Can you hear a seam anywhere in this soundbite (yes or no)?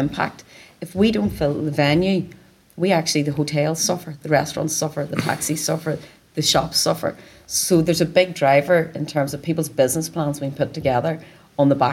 no